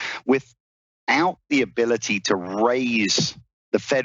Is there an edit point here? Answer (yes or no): no